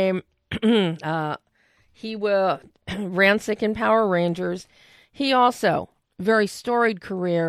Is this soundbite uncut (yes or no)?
yes